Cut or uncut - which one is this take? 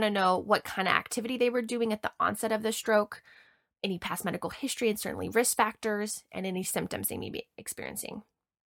uncut